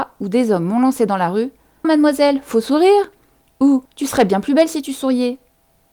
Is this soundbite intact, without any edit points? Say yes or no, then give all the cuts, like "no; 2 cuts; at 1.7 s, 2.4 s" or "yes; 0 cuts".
no; 2 cuts; at 1.8 s, 3.9 s